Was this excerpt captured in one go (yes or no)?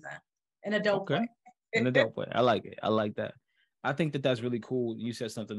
yes